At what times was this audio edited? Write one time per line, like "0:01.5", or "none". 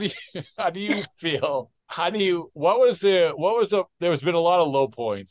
0:01.8